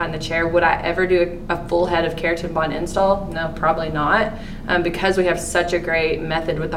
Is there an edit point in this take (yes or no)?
no